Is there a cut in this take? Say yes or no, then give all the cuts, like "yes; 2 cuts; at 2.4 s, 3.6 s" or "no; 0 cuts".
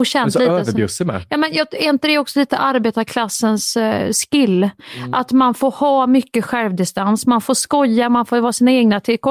no; 0 cuts